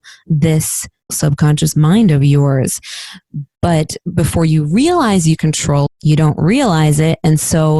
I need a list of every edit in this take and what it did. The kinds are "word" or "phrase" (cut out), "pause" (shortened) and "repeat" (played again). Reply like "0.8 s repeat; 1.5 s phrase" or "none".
1.1 s word; 5.4 s word; 5.9 s word